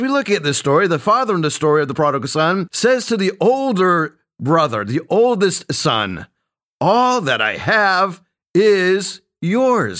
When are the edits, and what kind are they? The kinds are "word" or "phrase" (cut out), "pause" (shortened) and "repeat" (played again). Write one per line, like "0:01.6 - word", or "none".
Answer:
none